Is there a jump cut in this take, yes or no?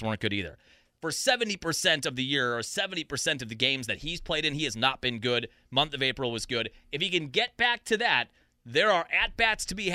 no